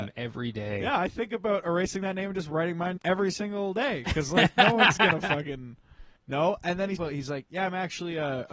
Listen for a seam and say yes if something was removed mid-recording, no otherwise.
yes